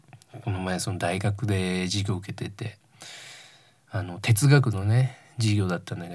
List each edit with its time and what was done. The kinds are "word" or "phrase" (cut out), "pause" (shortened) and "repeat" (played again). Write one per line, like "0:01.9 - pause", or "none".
none